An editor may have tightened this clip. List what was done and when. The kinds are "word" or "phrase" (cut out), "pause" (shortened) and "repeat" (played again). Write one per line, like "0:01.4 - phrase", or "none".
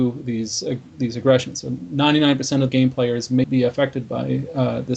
0:02.7 - word
0:03.4 - word